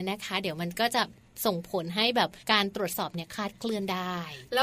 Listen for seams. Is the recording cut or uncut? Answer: cut